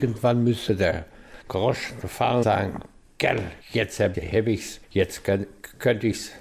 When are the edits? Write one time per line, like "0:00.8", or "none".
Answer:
0:01.4
0:02.4
0:03.6
0:04.1
0:04.8